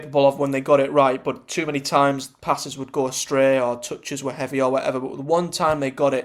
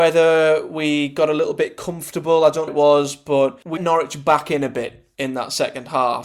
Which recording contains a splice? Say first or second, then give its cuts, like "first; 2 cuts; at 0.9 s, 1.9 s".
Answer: second; 2 cuts; at 2.7 s, 3.8 s